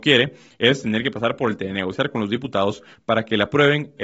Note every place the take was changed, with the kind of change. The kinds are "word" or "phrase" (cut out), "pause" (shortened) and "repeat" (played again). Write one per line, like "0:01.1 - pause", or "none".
0:01.6 - word